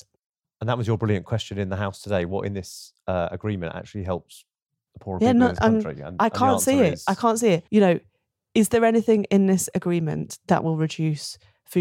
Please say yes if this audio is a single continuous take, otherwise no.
no